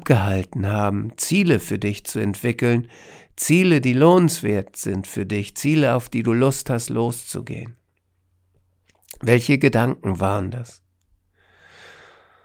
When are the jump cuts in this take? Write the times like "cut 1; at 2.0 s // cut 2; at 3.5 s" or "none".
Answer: none